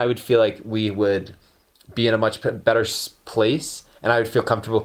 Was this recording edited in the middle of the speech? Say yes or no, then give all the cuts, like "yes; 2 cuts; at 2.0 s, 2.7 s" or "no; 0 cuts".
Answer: no; 0 cuts